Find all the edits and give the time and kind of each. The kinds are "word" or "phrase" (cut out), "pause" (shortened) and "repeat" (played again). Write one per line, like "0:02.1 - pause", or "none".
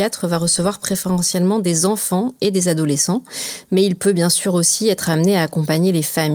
none